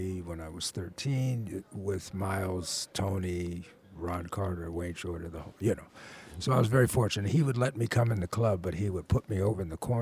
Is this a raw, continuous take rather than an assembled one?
yes; 0 cuts

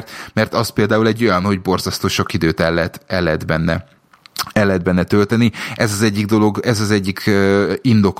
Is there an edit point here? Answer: no; 0 cuts

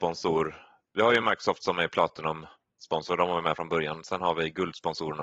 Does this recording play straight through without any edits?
yes; 0 cuts

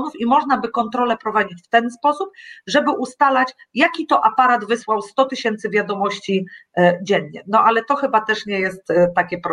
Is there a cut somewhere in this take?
no; 0 cuts

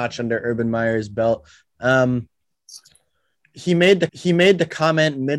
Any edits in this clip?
yes; 1 cut; at 4.1 s

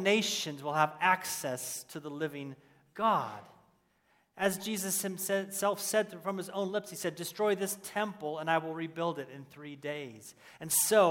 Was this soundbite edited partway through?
no; 0 cuts

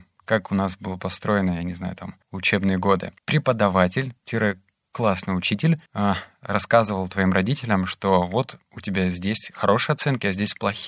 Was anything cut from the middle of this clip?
yes; 3 cuts; at 2.2 s, 3.2 s, 5.9 s

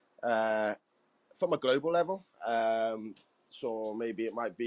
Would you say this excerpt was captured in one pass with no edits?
no; 1 cut; at 2.3 s

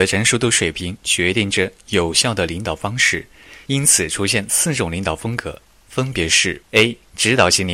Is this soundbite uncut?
no; 1 cut; at 6.7 s

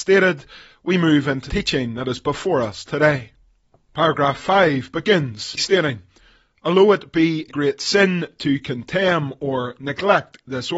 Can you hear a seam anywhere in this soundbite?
yes; 3 cuts; at 1.5 s, 5.6 s, 7.5 s

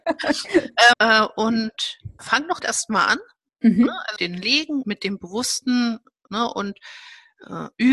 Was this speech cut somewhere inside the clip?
yes; 6 cuts; at 0.9 s, 2.2 s, 2.6 s, 4.2 s, 4.8 s, 6.3 s

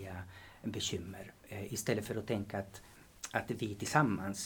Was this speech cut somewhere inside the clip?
yes; 1 cut; at 1.4 s

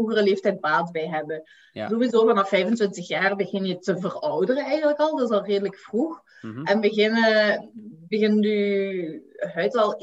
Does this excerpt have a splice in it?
no; 0 cuts

